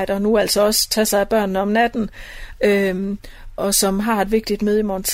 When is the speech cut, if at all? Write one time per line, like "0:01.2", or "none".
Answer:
0:03.6